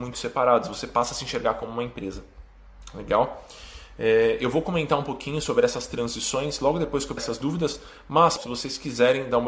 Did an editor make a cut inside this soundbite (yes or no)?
yes